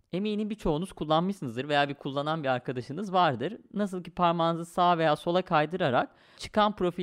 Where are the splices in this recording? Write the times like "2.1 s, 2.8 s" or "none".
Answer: none